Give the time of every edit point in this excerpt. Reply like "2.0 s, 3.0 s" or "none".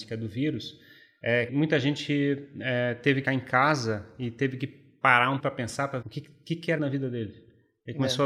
1.5 s, 3.2 s, 5.4 s, 6.0 s, 6.8 s